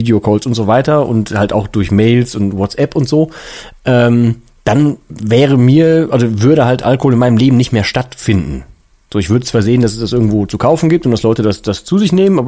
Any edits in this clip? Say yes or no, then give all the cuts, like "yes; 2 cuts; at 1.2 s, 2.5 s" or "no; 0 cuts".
no; 0 cuts